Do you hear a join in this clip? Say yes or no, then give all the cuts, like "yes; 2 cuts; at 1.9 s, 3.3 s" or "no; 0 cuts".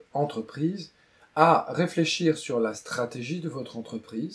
no; 0 cuts